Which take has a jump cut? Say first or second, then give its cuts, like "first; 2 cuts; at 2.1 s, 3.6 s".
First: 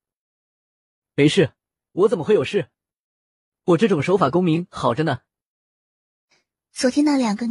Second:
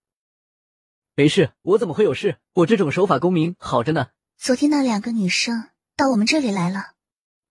second; 3 cuts; at 1.6 s, 2.5 s, 4.3 s